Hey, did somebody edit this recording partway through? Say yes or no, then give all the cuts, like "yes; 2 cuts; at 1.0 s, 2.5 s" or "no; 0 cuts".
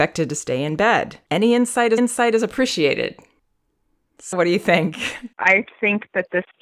yes; 4 cuts; at 1.2 s, 2.0 s, 4.3 s, 5.3 s